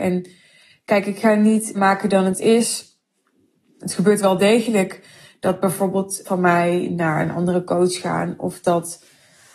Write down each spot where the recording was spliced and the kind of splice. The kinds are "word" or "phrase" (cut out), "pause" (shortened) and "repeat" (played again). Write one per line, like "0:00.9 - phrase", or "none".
0:01.7 - phrase
0:06.2 - word